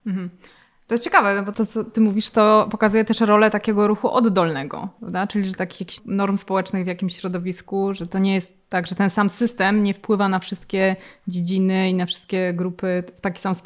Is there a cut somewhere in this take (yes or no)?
yes